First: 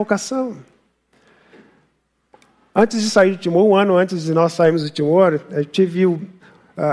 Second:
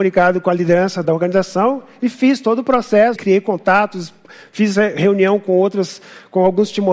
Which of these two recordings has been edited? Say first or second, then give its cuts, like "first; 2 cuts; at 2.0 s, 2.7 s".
second; 2 cuts; at 1.0 s, 3.2 s